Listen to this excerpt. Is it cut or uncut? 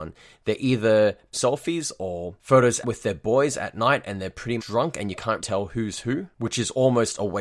cut